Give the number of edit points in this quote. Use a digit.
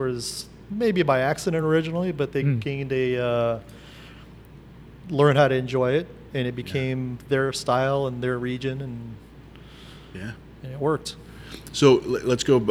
0